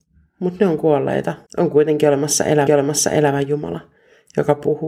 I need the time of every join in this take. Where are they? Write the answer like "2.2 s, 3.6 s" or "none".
1.5 s, 2.7 s